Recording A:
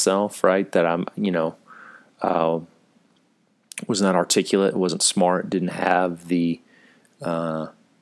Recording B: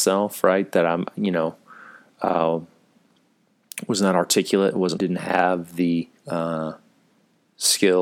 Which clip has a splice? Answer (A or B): B